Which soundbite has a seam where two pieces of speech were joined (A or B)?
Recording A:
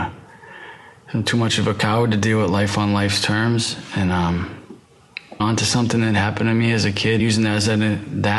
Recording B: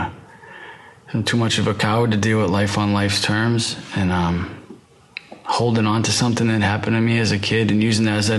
A